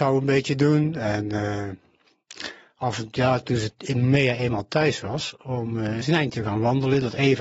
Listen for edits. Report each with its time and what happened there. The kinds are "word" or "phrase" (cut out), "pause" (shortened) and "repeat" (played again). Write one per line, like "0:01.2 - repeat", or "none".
0:06.0 - word